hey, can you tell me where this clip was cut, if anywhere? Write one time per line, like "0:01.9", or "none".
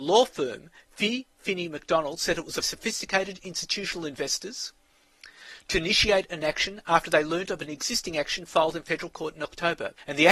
0:02.6